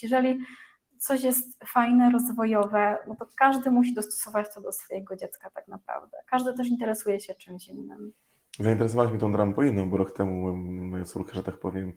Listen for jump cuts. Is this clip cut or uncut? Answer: uncut